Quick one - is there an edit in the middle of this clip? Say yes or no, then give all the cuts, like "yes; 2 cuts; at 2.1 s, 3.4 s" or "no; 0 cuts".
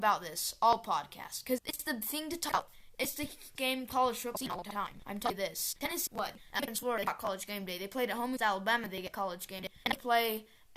yes; 6 cuts; at 1.6 s, 2.9 s, 3.6 s, 4.6 s, 6.1 s, 8.4 s